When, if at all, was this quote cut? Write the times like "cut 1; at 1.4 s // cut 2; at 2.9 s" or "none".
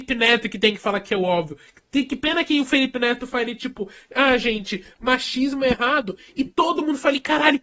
none